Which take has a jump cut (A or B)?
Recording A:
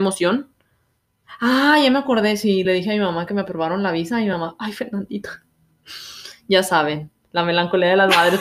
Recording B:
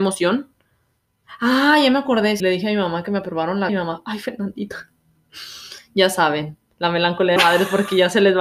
B